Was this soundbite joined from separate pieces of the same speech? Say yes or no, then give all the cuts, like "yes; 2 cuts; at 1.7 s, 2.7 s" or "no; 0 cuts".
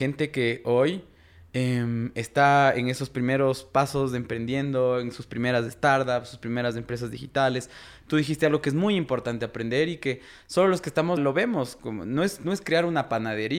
yes; 1 cut; at 11.2 s